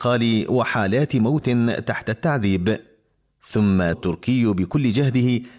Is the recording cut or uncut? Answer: cut